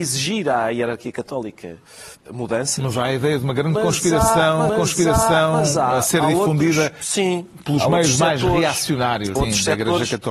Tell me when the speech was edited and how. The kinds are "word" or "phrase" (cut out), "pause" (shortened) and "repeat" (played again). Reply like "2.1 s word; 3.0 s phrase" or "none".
2.3 s word; 4.7 s repeat; 9.4 s phrase